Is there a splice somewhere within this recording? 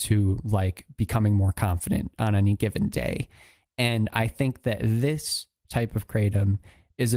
no; 0 cuts

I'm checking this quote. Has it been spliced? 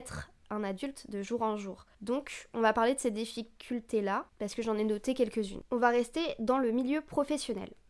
yes; 2 cuts; at 1.9 s, 4.3 s

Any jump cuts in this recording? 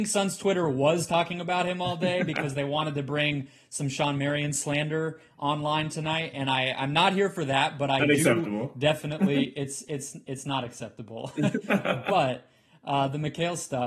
no; 0 cuts

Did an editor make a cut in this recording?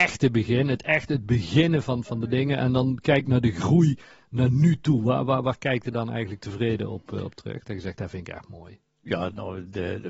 no; 0 cuts

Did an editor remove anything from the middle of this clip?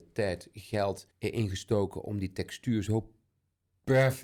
yes; 1 cut; at 1.1 s

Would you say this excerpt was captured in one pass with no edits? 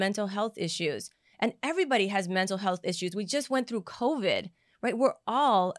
yes; 0 cuts

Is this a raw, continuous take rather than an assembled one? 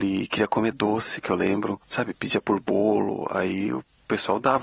no; 1 cut; at 1.8 s

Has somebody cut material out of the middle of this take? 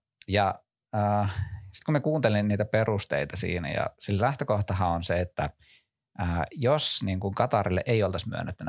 no; 0 cuts

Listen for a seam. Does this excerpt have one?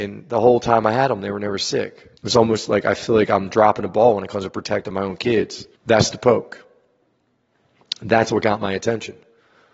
yes; 2 cuts; at 2.2 s, 5.8 s

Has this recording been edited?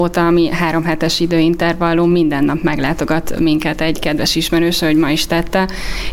no; 0 cuts

